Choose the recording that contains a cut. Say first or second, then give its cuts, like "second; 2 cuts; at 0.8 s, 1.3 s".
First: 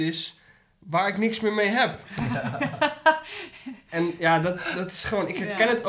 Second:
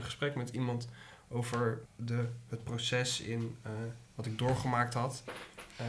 second; 1 cut; at 1.8 s